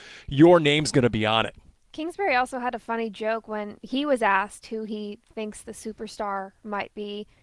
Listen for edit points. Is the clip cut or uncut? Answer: uncut